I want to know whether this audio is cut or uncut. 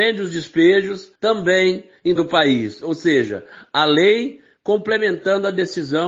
cut